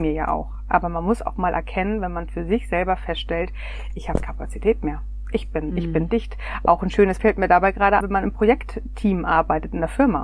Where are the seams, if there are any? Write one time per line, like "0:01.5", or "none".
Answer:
0:04.2
0:07.2
0:08.0